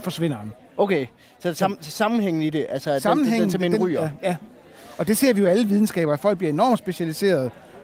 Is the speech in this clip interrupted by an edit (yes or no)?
no